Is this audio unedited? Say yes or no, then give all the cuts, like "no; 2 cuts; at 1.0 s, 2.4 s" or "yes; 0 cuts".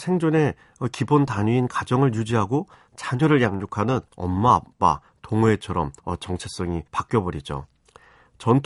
no; 3 cuts; at 4.1 s, 6.0 s, 6.9 s